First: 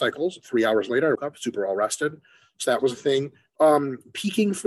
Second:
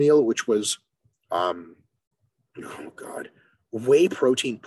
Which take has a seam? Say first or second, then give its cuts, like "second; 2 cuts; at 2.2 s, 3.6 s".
first; 2 cuts; at 1.1 s, 3.5 s